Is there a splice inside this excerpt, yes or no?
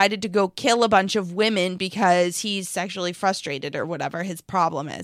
no